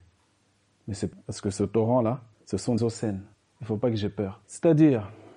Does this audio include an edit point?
yes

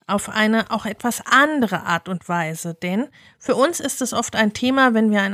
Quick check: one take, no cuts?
yes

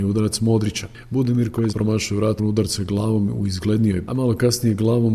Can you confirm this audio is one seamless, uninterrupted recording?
no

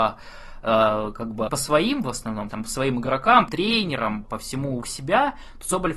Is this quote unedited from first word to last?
no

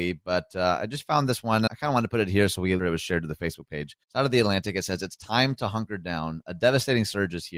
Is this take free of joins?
no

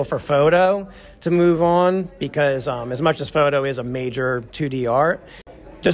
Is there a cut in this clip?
no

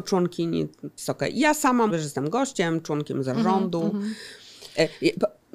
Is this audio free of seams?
no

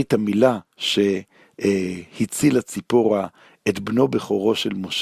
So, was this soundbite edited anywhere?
no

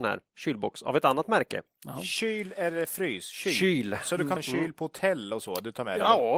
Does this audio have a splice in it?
yes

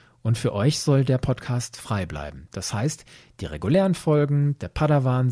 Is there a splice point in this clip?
no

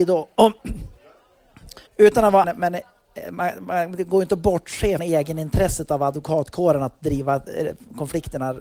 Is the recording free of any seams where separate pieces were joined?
no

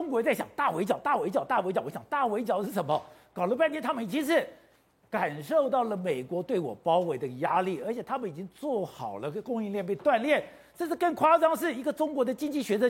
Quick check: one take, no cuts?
yes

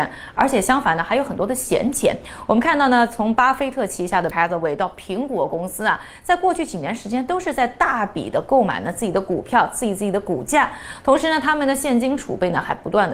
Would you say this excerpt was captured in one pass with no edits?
no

